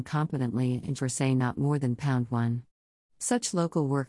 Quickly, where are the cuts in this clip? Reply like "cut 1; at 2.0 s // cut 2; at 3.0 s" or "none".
cut 1; at 1.0 s